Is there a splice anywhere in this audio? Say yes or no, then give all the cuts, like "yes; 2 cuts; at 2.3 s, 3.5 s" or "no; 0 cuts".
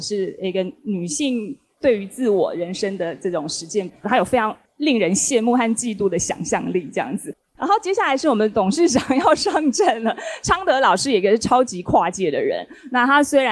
yes; 1 cut; at 4.0 s